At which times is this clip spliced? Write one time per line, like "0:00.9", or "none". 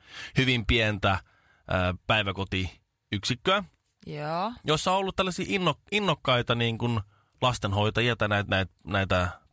none

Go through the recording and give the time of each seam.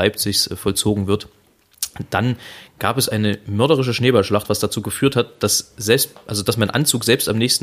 none

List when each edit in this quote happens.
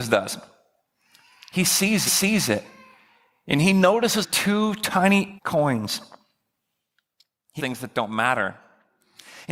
0:02.1
0:04.2
0:05.4
0:07.6

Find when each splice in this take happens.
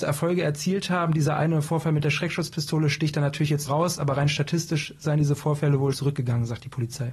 0:03.7
0:05.9

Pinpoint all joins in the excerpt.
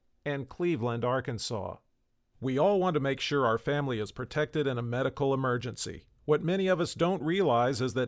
none

